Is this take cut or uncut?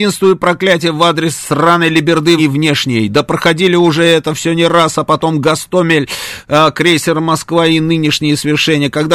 cut